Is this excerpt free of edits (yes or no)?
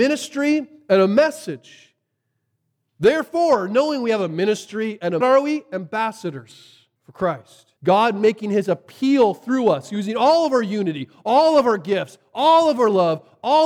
no